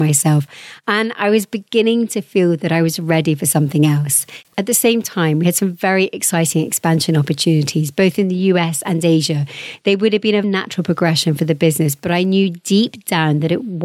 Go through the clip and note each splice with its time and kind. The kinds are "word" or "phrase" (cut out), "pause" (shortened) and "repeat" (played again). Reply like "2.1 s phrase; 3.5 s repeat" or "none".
10.4 s word